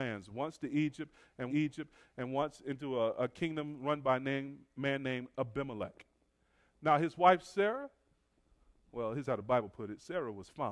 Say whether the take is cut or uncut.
cut